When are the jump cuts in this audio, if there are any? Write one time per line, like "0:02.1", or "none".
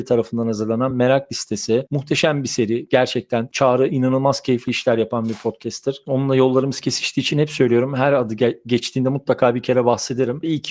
none